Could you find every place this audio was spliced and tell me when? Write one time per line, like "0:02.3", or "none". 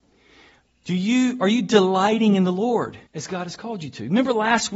0:03.1